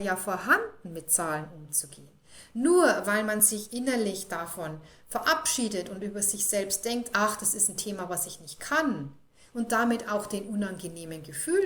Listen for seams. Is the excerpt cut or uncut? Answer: uncut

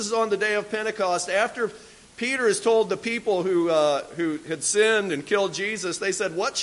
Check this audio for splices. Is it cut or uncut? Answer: uncut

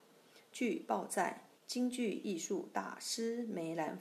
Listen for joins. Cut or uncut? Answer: cut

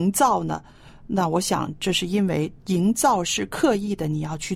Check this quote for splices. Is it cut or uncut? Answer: cut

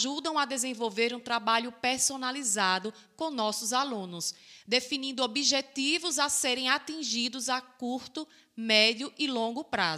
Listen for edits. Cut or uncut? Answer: uncut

